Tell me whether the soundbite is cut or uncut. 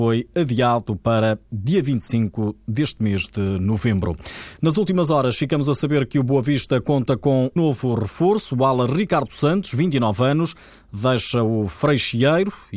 cut